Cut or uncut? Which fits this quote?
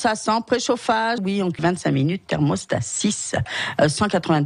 cut